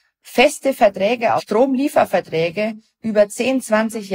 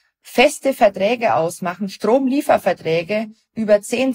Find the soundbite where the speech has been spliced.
first; 1 cut; at 1.4 s

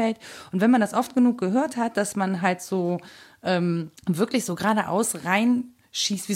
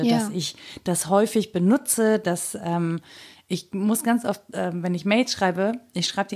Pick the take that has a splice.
first; 1 cut; at 4.0 s

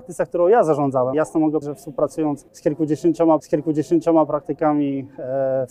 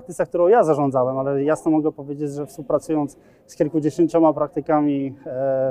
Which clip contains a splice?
first; 4 cuts; at 1.1 s, 1.6 s, 2.5 s, 3.4 s

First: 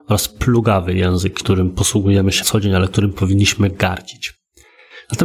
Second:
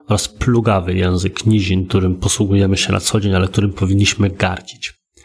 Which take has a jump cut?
first; 2 cuts; at 1.4 s, 2.4 s

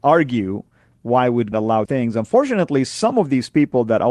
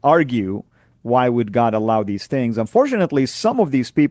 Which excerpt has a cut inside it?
first; 2 cuts; at 1.5 s, 1.9 s

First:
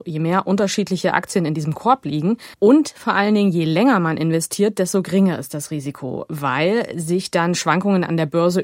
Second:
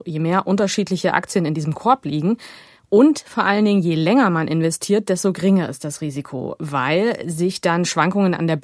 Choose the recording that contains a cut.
first; 1 cut; at 2.5 s

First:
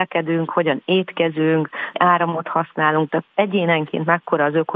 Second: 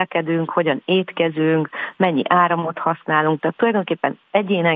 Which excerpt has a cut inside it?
first; 2 cuts; at 1.9 s, 3.3 s

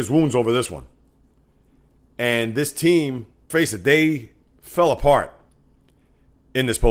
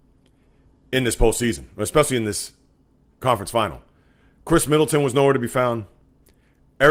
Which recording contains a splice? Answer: first; 1 cut; at 3.5 s

